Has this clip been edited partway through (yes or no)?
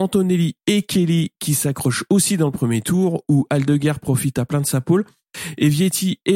no